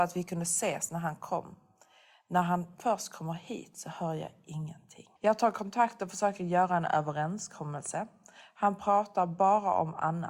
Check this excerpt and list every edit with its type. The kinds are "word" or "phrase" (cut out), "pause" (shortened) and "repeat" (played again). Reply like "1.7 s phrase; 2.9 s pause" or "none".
5.2 s pause